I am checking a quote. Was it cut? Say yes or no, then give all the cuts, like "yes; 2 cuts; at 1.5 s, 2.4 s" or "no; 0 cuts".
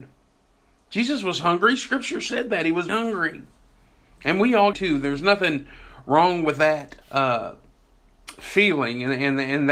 yes; 3 cuts; at 2.9 s, 4.7 s, 7.0 s